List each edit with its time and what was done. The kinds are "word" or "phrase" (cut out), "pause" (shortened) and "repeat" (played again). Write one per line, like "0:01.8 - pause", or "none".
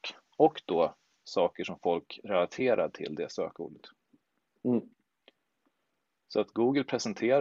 none